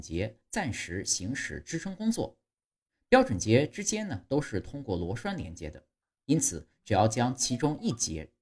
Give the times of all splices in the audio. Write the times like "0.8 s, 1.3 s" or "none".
none